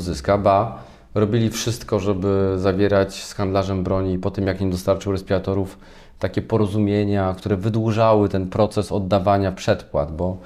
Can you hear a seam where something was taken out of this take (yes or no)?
no